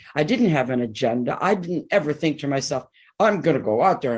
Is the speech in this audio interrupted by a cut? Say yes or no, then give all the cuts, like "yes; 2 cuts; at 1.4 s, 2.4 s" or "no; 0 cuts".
no; 0 cuts